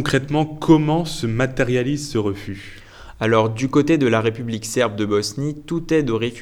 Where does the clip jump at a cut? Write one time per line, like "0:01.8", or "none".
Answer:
none